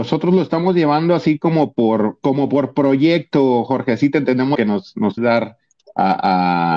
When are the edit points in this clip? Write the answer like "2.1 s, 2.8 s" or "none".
4.5 s, 5.2 s